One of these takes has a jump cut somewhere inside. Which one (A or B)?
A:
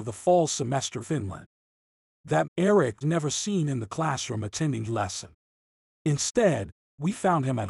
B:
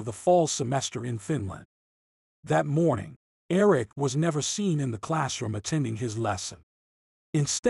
A